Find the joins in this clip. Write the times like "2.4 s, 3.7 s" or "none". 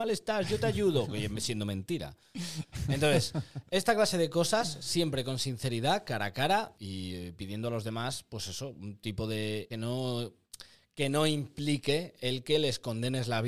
6.7 s, 9.7 s, 10.7 s